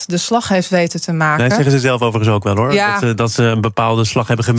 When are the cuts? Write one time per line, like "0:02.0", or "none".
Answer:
none